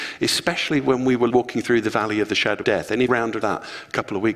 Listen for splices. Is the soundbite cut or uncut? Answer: cut